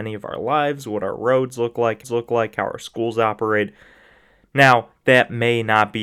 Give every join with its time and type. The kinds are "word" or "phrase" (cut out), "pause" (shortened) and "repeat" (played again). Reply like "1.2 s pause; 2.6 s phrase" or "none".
2.0 s repeat